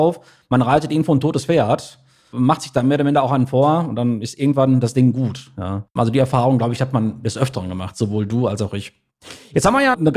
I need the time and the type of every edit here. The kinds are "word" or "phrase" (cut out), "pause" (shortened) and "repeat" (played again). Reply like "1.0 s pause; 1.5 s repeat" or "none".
5.9 s pause